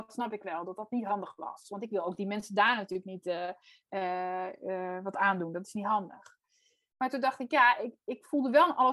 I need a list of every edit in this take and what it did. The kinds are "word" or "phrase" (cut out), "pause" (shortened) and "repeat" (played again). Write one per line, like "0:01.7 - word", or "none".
none